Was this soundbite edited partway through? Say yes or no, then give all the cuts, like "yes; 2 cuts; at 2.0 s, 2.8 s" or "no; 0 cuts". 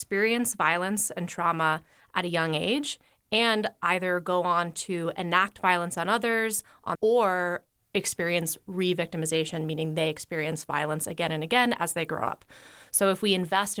yes; 1 cut; at 6.9 s